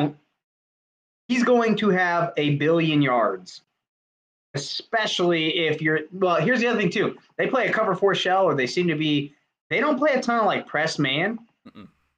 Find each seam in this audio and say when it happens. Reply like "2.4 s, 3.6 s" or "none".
none